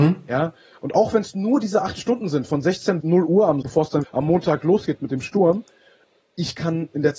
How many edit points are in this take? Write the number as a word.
three